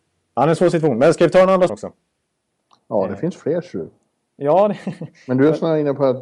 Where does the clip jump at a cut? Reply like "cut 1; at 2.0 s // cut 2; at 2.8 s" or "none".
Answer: cut 1; at 1.7 s